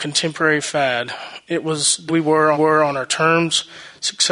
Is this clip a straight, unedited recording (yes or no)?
no